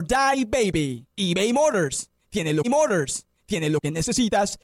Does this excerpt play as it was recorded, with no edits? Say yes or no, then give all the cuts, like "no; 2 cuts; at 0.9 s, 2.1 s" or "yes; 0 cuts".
no; 2 cuts; at 1.1 s, 2.6 s